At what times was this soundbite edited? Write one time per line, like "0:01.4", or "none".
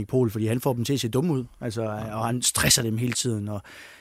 none